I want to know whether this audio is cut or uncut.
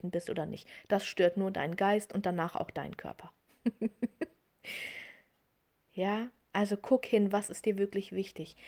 uncut